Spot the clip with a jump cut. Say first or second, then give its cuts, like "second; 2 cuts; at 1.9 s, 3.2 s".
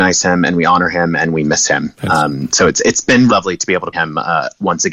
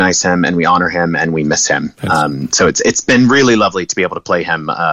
first; 2 cuts; at 3.3 s, 3.9 s